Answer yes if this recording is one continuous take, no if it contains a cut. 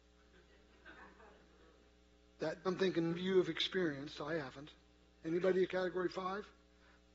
no